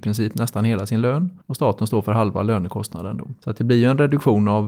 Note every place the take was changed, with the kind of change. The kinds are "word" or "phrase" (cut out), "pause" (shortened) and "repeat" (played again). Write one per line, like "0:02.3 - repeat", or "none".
0:01.4 - pause